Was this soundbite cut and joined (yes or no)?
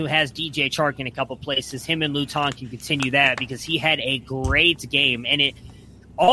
no